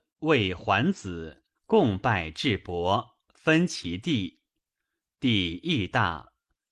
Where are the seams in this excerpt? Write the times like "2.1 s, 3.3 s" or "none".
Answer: 1.6 s